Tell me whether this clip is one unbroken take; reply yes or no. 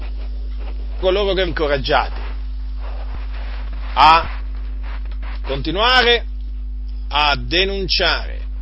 no